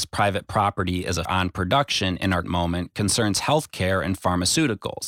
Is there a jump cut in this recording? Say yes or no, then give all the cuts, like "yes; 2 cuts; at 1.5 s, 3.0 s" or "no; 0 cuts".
yes; 2 cuts; at 1.2 s, 2.4 s